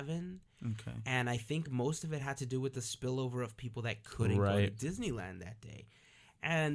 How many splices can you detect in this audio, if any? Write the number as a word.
zero